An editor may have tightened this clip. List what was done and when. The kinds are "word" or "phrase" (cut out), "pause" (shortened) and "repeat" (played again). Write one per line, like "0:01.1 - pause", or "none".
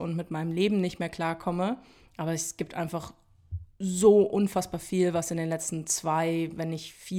none